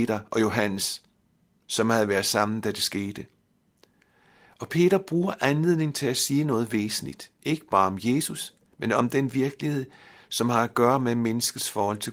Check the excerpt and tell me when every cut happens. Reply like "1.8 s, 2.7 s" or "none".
none